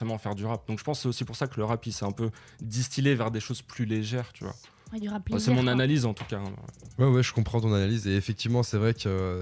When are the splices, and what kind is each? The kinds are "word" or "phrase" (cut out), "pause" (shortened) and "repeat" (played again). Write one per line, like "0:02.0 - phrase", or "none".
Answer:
none